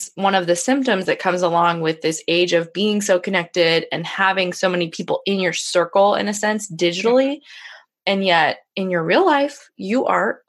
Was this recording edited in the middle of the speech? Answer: no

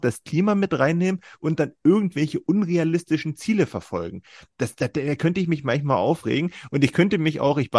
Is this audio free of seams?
yes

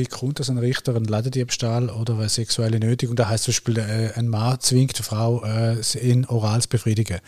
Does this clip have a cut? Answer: no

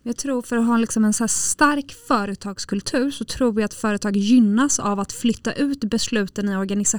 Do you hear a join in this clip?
no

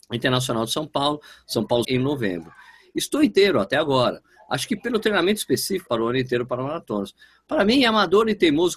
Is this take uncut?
no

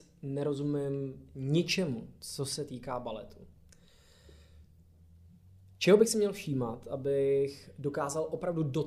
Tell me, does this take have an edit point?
no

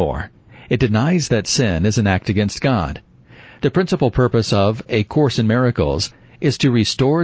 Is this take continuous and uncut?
yes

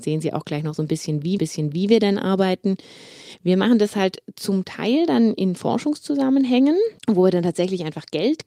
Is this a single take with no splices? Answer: no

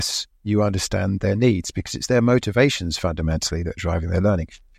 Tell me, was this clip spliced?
no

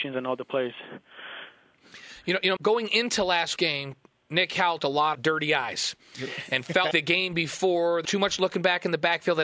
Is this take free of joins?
no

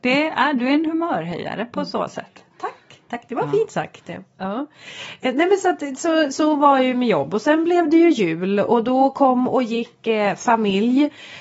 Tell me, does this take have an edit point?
no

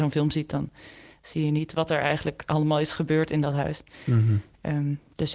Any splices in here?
no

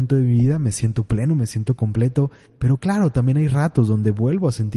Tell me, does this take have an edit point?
no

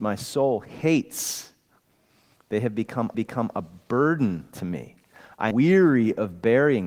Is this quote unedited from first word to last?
no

